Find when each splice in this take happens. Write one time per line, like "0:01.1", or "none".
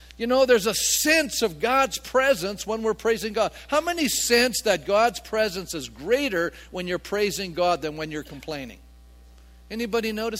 none